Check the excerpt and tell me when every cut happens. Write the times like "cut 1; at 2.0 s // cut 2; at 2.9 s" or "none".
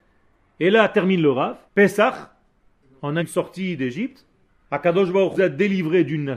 cut 1; at 1.7 s // cut 2; at 3.2 s // cut 3; at 4.5 s // cut 4; at 5.3 s